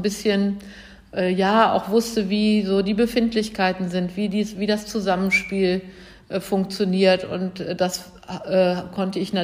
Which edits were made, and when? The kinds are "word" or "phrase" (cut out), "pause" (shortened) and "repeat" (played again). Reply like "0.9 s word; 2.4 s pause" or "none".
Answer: none